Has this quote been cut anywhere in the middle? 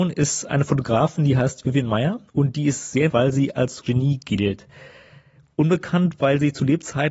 yes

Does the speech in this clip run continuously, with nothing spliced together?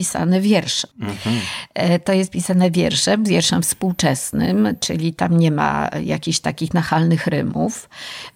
no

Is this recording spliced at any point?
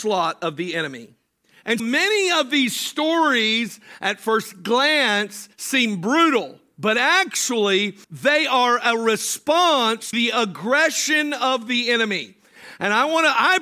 yes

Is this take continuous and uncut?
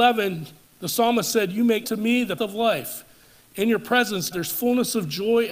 no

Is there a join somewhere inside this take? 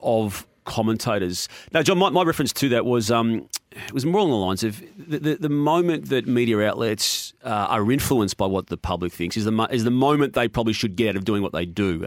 no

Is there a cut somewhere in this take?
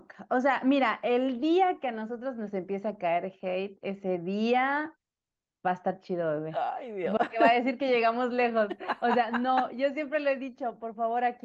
no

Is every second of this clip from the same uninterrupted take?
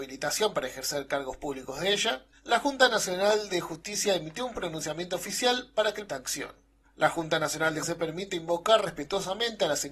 no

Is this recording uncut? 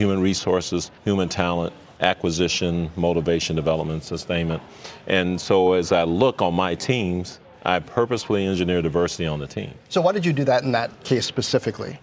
no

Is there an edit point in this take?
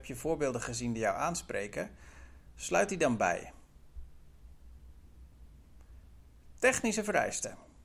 no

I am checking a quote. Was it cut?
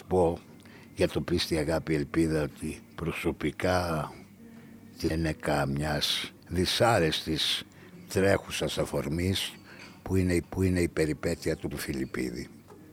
yes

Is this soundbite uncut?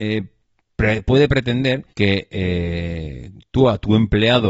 no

